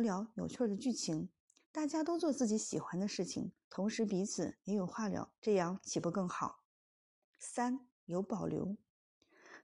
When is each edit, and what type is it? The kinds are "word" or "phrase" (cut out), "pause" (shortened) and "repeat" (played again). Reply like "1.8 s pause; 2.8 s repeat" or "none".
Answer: 3.6 s pause; 5.4 s pause